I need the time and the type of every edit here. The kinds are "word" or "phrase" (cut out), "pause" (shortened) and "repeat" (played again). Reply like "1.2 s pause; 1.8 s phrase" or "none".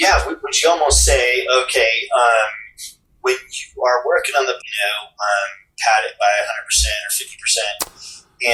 4.6 s word